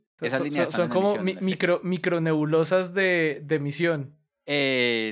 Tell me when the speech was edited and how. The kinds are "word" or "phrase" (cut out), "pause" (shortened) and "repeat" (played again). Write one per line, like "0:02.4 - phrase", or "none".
none